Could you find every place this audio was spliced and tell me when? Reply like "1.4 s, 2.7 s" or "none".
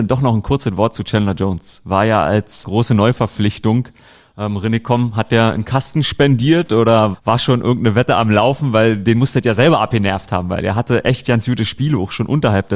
2.6 s, 7.1 s